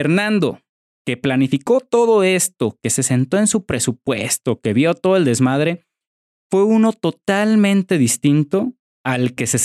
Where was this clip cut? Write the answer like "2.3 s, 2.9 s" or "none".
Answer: none